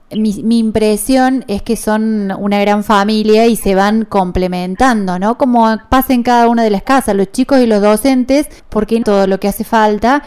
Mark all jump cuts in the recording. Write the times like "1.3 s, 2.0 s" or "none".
8.6 s, 9.0 s